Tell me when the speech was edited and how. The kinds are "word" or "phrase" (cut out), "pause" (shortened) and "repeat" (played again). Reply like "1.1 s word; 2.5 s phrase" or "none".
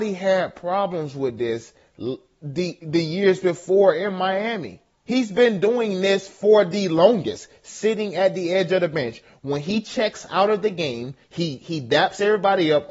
4.9 s pause; 11.2 s pause